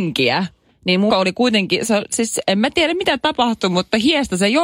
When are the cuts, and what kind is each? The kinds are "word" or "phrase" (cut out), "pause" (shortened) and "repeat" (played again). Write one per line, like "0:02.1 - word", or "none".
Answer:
0:01.1 - word